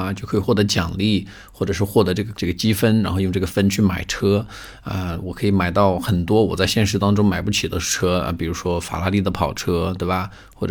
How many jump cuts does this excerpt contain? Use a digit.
1